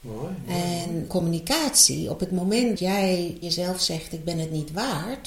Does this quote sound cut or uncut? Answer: cut